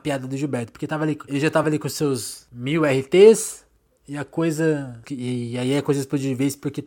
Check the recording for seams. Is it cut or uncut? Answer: uncut